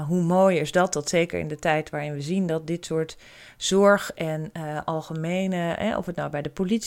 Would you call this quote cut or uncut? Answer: uncut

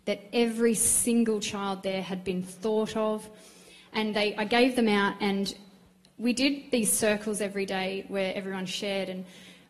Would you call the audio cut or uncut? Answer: uncut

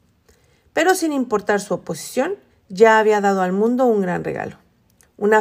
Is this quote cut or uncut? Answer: cut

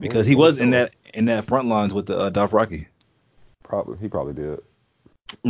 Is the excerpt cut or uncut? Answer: uncut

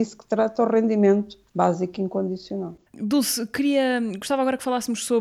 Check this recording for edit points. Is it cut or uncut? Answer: cut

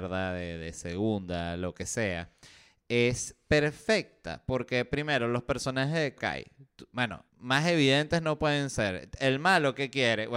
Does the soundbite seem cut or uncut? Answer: cut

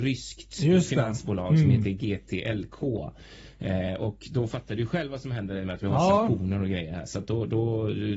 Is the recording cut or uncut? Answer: uncut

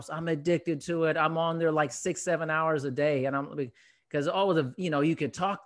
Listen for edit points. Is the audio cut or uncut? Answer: uncut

